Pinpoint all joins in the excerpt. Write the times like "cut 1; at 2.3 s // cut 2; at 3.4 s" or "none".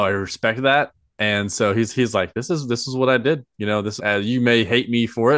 cut 1; at 4.0 s